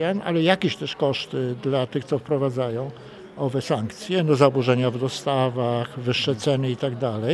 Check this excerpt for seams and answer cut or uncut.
uncut